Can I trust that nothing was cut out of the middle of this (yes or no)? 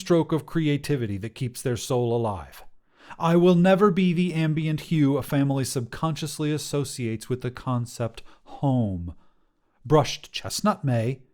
yes